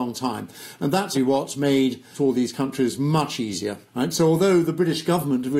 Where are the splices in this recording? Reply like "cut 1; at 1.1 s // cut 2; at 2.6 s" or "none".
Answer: cut 1; at 1.1 s // cut 2; at 2.1 s // cut 3; at 3.9 s